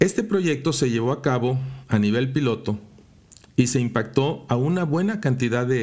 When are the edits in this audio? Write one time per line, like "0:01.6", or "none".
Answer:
none